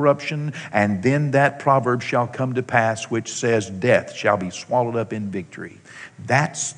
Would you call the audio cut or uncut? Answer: uncut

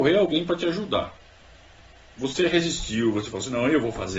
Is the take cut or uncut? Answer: uncut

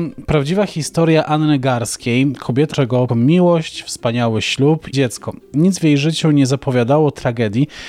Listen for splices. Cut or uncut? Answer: cut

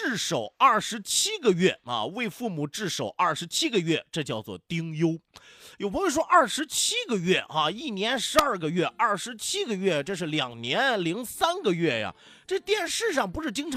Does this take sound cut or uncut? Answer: uncut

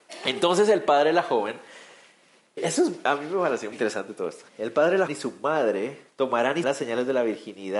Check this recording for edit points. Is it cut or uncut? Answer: cut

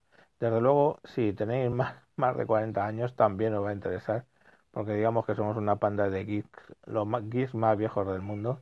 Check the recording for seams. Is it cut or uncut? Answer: uncut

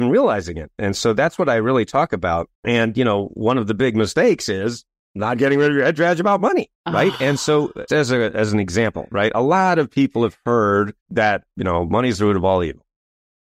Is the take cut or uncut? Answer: cut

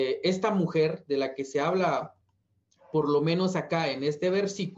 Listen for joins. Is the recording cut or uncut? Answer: uncut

